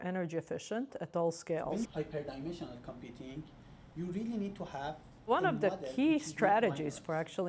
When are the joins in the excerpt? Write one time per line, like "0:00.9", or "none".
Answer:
0:01.9